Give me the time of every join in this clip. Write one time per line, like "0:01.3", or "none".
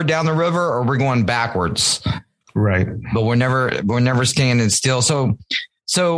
none